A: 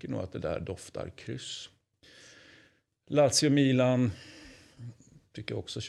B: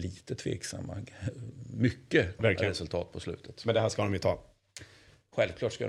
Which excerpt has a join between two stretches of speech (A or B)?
B